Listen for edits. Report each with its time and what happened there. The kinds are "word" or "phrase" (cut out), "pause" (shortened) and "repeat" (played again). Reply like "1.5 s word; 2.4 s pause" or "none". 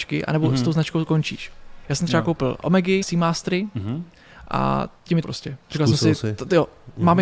1.8 s pause; 3.0 s word; 5.2 s phrase; 5.6 s pause